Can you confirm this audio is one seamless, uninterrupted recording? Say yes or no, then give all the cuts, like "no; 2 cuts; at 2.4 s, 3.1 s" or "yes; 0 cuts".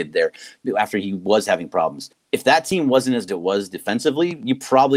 no; 2 cuts; at 2.1 s, 3.3 s